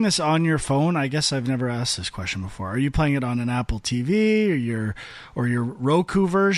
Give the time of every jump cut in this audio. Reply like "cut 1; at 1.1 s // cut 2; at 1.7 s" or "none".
none

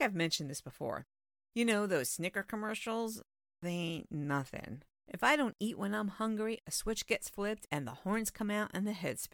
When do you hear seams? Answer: cut 1; at 4.9 s

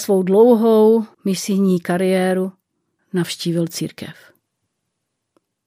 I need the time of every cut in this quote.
cut 1; at 1.1 s // cut 2; at 3.0 s

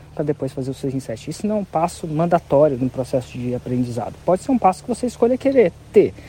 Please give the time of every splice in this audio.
none

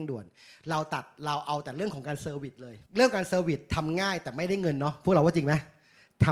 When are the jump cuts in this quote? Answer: cut 1; at 2.9 s

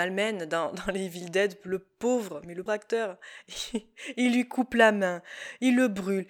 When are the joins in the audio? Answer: cut 1; at 2.7 s

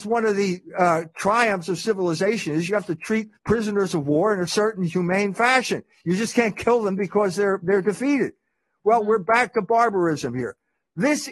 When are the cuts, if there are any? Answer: cut 1; at 3.4 s

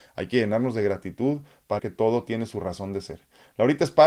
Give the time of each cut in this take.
cut 1; at 1.8 s

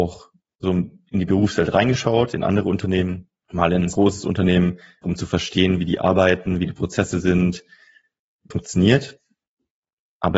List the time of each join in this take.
cut 1; at 3.4 s // cut 2; at 3.9 s // cut 3; at 5.0 s // cut 4; at 8.5 s

